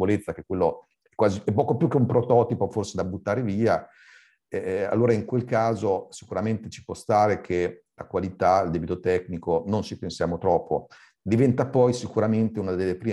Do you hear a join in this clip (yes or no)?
no